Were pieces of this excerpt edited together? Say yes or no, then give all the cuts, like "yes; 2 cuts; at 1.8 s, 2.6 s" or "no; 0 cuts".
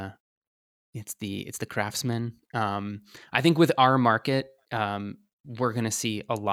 no; 0 cuts